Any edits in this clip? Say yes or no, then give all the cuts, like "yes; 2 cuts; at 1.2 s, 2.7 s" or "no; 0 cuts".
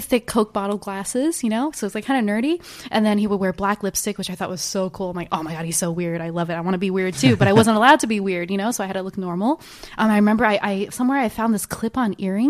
yes; 1 cut; at 10.9 s